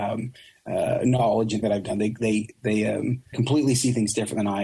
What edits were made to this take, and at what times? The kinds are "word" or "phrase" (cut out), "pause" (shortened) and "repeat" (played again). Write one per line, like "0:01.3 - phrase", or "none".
0:01.6 - word
0:02.2 - word
0:03.3 - word